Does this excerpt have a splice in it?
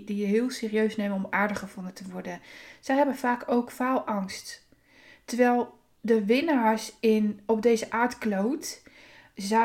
yes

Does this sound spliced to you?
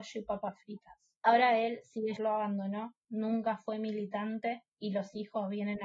yes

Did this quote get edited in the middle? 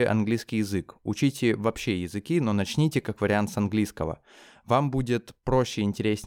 no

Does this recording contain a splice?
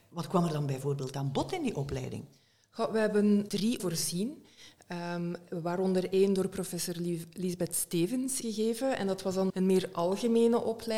yes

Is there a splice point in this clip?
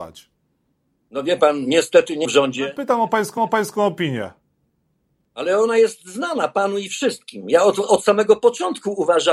yes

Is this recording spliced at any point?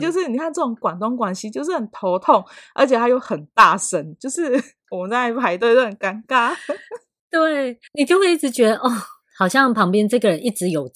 yes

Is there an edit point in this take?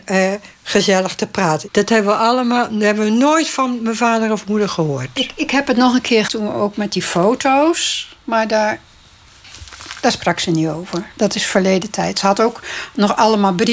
yes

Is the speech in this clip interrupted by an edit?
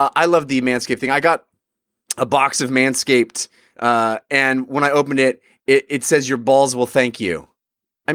no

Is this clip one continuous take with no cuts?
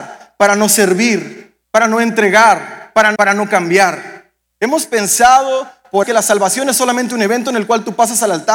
no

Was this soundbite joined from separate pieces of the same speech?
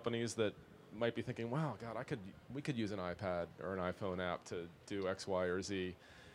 no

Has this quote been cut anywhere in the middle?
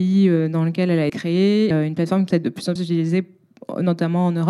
yes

